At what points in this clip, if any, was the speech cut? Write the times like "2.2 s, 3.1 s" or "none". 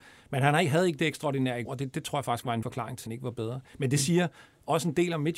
1.7 s, 2.6 s, 3.1 s